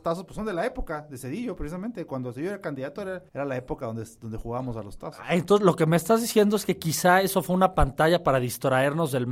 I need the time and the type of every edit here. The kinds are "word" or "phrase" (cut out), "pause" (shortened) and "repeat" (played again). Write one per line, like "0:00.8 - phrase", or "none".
0:03.3 - pause

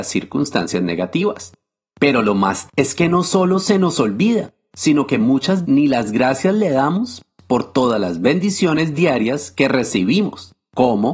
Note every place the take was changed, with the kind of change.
0:02.7 - word
0:05.6 - word

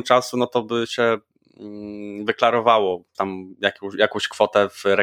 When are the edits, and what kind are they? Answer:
0:03.1 - phrase

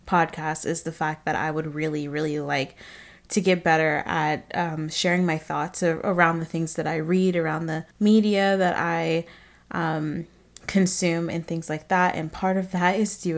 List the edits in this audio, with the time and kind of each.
0:07.9 - pause

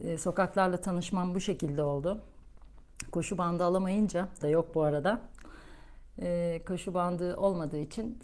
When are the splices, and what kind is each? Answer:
0:04.4 - phrase

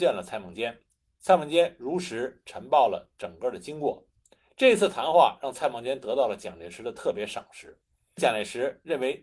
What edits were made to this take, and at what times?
0:08.2 - phrase

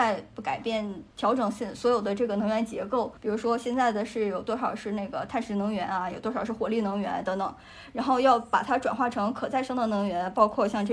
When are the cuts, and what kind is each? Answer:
0:01.1 - pause
0:03.2 - pause

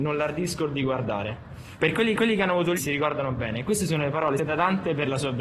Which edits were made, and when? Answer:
0:02.1 - repeat
0:02.8 - phrase
0:04.4 - word

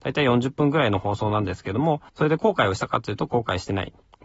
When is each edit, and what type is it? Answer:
0:02.1 - pause

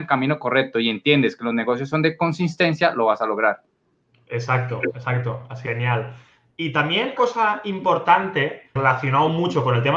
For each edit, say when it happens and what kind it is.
0:05.7 - word
0:07.2 - word
0:08.8 - word

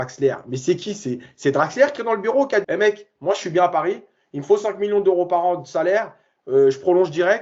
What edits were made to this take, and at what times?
0:02.0 - word
0:02.6 - word

